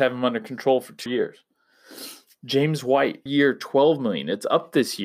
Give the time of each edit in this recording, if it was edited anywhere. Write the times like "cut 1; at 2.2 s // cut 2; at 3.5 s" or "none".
cut 1; at 1.1 s // cut 2; at 3.3 s

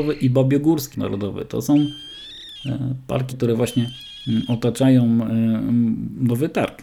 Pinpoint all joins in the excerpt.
cut 1; at 0.9 s // cut 2; at 3.3 s

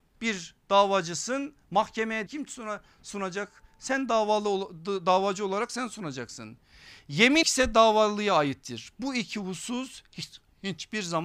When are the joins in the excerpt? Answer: cut 1; at 2.3 s // cut 2; at 7.4 s

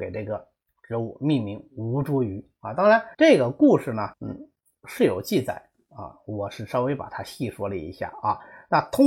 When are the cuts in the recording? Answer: cut 1; at 3.1 s // cut 2; at 4.1 s

